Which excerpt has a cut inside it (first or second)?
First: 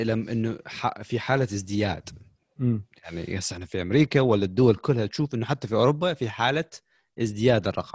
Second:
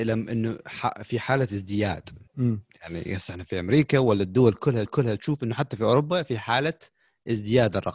second